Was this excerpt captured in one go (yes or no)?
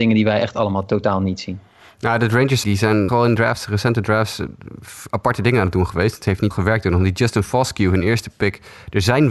no